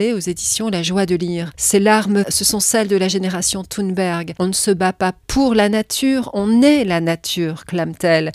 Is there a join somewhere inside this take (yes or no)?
yes